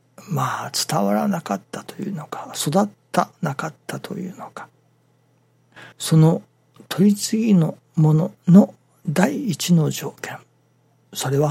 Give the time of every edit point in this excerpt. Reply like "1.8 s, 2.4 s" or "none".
5.9 s, 8.4 s